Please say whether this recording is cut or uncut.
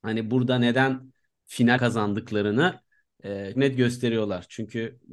cut